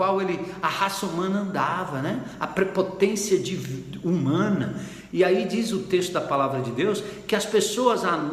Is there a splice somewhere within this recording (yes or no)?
no